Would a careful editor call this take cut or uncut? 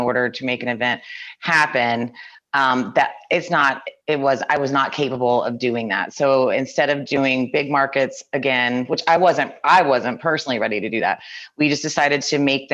cut